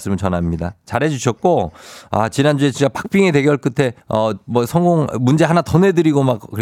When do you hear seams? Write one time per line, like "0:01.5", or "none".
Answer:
0:04.0